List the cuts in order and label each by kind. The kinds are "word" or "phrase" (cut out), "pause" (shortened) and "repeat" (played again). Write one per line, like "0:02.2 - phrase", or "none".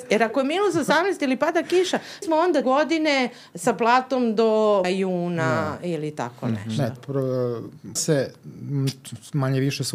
0:02.2 - word
0:02.6 - word
0:04.8 - word
0:07.0 - word
0:08.0 - word